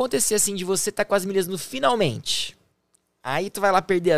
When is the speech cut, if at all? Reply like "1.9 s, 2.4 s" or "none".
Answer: none